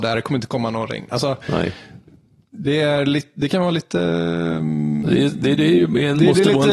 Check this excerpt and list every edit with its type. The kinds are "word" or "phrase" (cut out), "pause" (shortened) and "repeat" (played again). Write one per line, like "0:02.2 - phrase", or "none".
none